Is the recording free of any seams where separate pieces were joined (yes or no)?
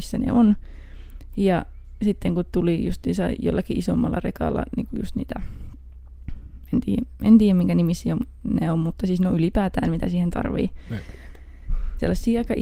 yes